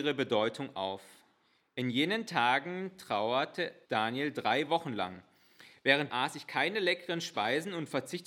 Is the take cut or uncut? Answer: cut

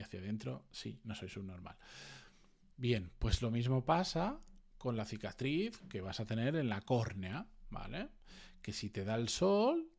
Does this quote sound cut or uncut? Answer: uncut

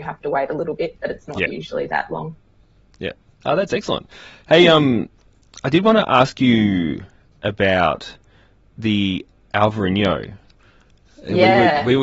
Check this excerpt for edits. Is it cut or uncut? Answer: uncut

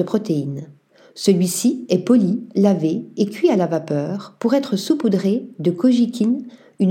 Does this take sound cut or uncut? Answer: uncut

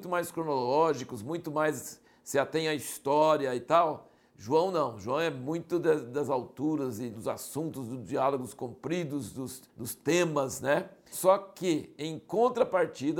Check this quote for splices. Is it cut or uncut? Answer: cut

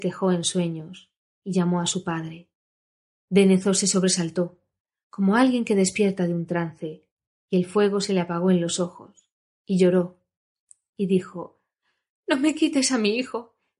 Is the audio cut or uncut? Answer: uncut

